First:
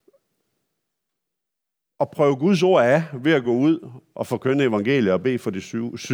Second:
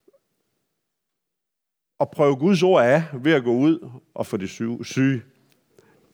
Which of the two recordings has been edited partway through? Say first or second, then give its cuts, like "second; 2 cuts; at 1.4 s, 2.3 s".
second; 1 cut; at 4.3 s